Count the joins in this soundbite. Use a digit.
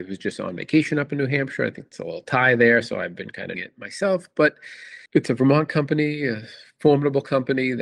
3